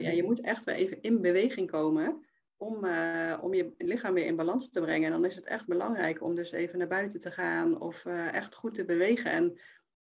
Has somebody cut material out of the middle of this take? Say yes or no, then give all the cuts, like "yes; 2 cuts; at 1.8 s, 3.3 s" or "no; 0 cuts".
no; 0 cuts